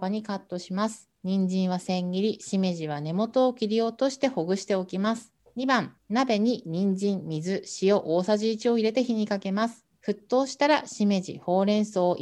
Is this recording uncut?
no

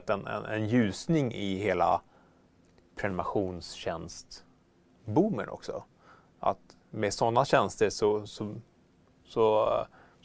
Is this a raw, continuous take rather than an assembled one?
yes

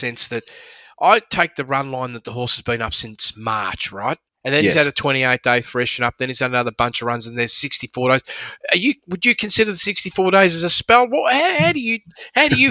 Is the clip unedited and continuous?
no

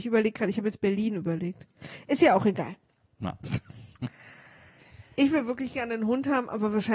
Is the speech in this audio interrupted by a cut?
no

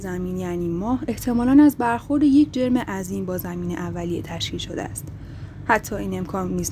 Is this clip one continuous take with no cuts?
yes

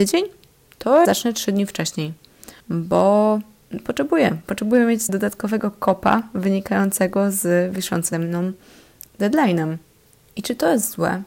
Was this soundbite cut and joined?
yes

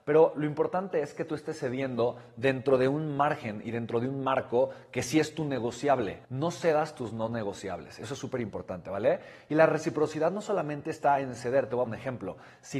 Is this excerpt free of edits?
no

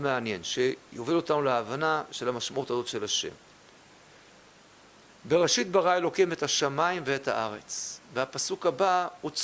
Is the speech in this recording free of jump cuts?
yes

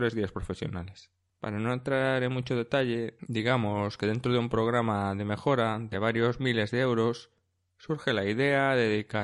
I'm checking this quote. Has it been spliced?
no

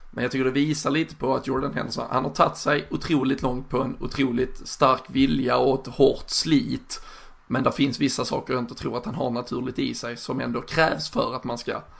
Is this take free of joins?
yes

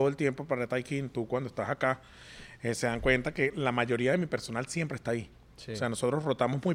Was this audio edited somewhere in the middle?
no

